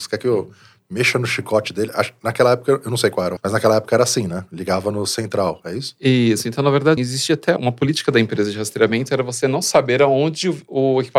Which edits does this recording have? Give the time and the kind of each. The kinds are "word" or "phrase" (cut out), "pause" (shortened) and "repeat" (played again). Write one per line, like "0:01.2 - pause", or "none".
0:03.4 - word
0:07.0 - word
0:07.6 - word